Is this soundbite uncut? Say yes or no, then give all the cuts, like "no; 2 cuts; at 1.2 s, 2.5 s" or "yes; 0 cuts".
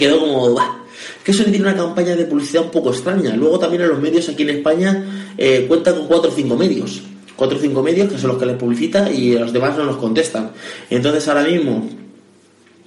yes; 0 cuts